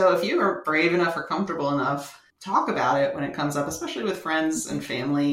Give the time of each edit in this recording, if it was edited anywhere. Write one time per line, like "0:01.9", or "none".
0:02.3

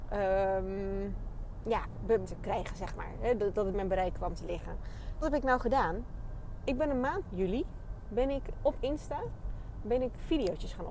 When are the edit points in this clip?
0:02.2
0:03.7
0:05.2
0:07.3
0:08.5

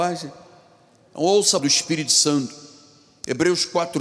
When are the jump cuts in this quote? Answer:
0:01.6

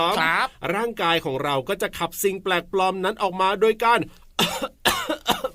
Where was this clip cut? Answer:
none

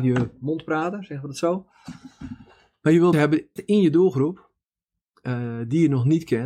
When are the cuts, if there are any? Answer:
0:03.1
0:03.6

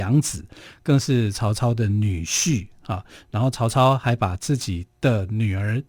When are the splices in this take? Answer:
none

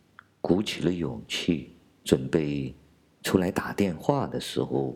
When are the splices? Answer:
none

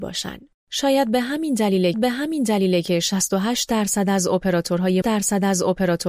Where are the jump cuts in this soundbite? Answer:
0:01.9
0:05.0

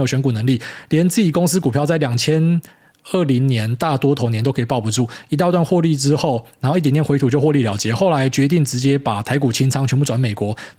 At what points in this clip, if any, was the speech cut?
none

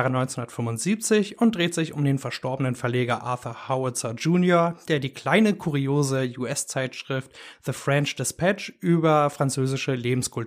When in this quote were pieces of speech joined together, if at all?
none

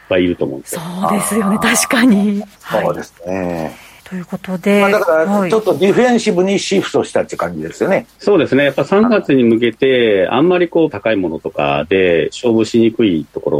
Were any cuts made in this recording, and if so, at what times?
0:02.5
0:04.0
0:10.9

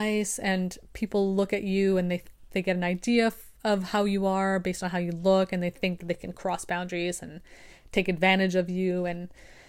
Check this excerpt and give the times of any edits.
none

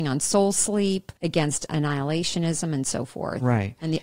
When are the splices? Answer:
0:01.2

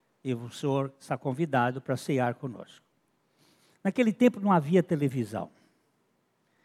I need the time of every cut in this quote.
none

